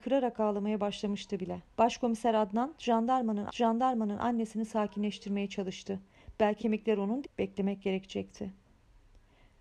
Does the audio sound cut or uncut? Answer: cut